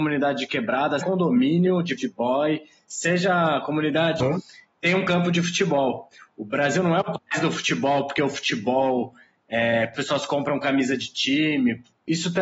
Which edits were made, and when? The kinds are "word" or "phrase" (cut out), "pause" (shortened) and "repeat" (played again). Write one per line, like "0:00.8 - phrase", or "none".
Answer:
0:01.0 - word
0:02.0 - word
0:04.2 - word
0:09.9 - word